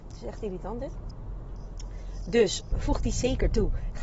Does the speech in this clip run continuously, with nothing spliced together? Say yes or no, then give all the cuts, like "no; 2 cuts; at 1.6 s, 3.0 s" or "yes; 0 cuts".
no; 1 cut; at 2.7 s